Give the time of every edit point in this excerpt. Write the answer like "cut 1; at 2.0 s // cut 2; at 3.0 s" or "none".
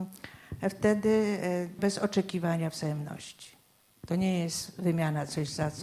cut 1; at 1.8 s